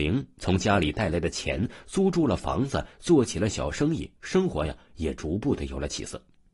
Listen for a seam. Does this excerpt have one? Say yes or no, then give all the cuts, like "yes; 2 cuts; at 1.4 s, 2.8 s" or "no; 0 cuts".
yes; 1 cut; at 4.2 s